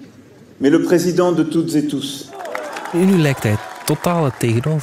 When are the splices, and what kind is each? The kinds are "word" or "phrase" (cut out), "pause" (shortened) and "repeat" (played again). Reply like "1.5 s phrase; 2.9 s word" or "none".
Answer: none